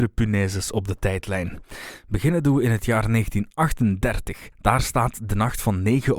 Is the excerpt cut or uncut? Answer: cut